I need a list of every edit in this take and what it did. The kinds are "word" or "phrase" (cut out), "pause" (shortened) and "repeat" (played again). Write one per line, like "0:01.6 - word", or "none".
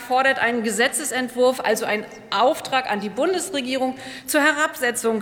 none